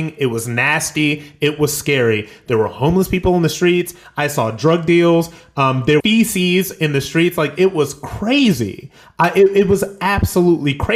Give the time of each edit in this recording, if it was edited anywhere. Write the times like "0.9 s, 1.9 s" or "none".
6.0 s